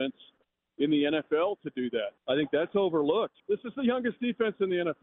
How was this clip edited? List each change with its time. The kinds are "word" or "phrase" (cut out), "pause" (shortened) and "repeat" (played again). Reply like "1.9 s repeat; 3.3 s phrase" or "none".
2.2 s pause; 3.4 s pause